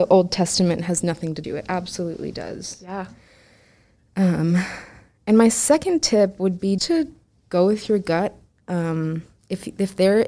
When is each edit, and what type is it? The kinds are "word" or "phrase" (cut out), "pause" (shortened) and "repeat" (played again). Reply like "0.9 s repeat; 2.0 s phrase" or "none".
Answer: 1.4 s word; 6.8 s word

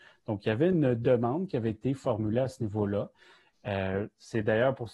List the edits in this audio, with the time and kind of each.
none

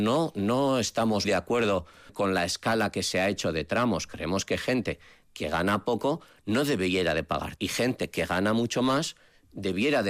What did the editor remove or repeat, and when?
1.2 s word; 2.1 s word; 7.6 s word

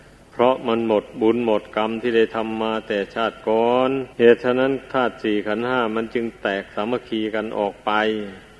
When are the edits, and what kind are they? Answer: 4.1 s pause

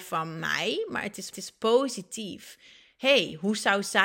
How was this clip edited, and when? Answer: 1.3 s repeat

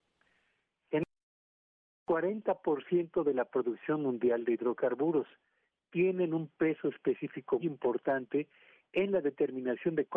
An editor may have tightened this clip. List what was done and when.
7.6 s word

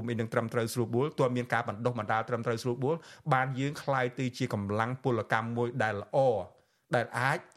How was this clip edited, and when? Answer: none

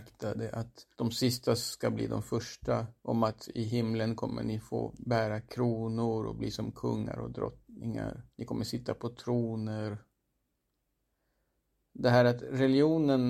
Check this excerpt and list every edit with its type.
0.9 s pause; 3.0 s pause; 8.3 s pause

